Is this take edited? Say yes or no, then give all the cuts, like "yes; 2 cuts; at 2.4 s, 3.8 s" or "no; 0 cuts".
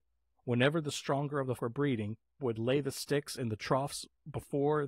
yes; 2 cuts; at 1.6 s, 2.4 s